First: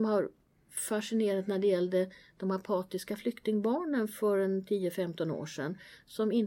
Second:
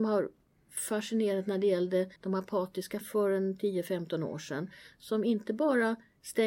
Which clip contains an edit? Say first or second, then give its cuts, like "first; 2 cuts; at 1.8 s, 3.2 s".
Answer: second; 2 cuts; at 2.2 s, 3.0 s